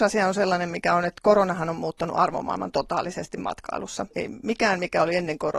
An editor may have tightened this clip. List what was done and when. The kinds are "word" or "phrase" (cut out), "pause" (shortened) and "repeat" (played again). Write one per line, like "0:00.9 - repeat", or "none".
0:04.1 - pause